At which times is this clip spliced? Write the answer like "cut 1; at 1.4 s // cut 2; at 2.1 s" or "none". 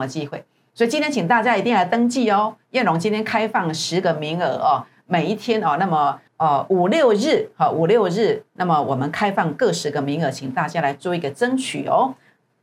cut 1; at 6.3 s